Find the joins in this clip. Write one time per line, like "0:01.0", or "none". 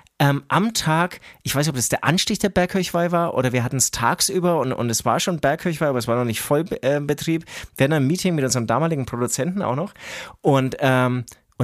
none